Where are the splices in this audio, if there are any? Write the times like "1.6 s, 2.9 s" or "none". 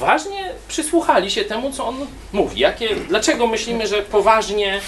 none